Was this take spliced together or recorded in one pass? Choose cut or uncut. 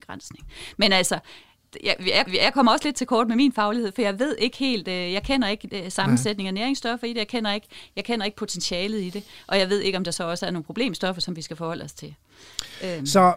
cut